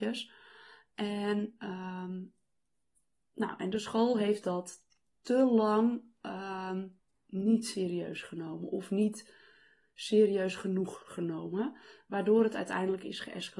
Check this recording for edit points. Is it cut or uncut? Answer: uncut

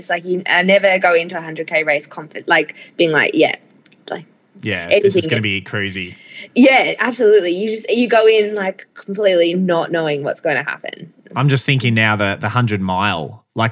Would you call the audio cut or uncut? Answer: uncut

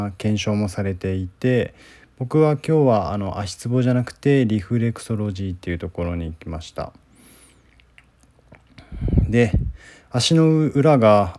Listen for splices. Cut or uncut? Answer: uncut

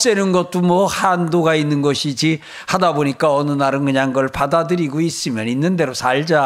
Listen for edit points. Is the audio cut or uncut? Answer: uncut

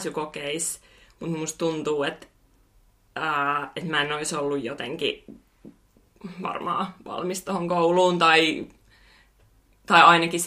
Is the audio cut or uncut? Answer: uncut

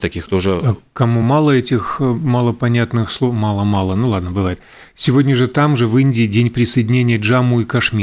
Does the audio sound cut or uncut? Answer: uncut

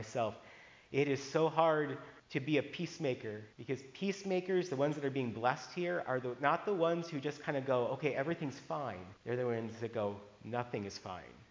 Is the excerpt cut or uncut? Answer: cut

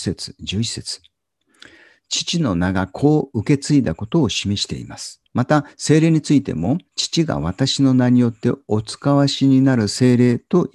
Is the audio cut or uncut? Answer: cut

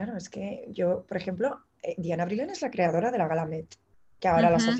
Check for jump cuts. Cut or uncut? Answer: uncut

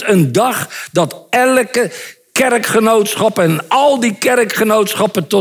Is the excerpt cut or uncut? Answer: uncut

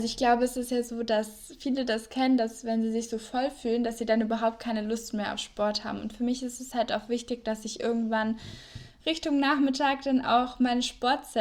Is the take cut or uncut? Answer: uncut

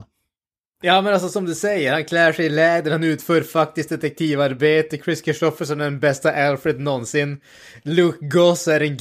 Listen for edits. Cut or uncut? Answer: uncut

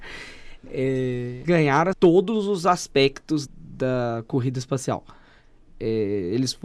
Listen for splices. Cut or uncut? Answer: cut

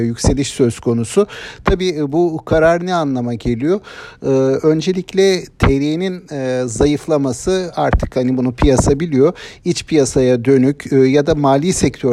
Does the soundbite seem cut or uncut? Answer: uncut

